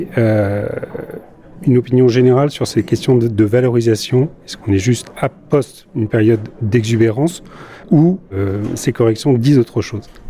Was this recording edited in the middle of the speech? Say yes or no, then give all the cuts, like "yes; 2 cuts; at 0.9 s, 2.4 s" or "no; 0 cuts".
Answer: yes; 2 cuts; at 4.4 s, 7.8 s